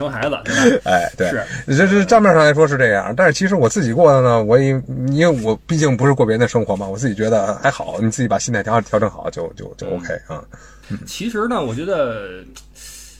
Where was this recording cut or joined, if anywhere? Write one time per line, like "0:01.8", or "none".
none